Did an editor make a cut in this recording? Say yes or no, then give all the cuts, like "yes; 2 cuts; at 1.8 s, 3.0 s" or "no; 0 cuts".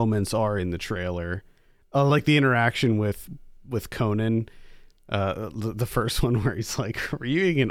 no; 0 cuts